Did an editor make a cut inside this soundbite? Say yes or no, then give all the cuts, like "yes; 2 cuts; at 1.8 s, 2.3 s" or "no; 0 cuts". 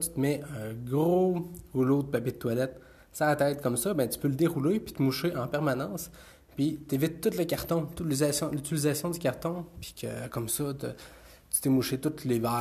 no; 0 cuts